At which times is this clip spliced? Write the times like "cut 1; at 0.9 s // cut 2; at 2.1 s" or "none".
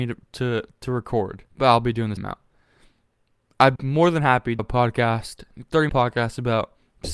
cut 1; at 1.5 s // cut 2; at 2.2 s // cut 3; at 3.8 s // cut 4; at 4.6 s // cut 5; at 5.9 s